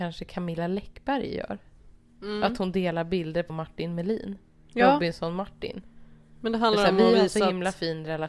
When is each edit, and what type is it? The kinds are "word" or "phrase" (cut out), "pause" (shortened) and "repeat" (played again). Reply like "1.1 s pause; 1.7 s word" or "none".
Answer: 3.5 s word